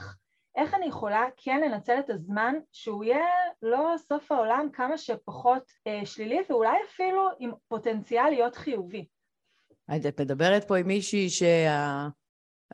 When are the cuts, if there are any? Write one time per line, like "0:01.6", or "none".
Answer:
0:05.8